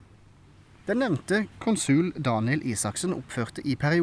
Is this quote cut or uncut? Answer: cut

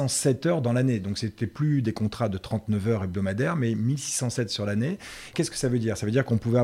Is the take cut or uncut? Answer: cut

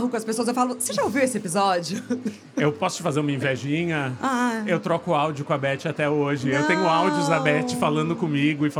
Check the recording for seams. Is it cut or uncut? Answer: uncut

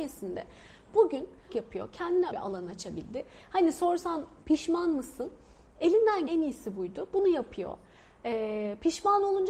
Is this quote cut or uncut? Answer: cut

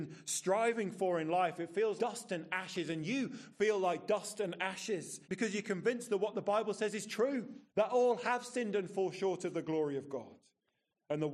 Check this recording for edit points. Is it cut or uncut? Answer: cut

